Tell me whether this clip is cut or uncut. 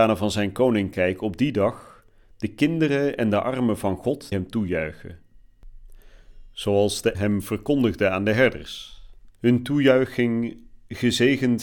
cut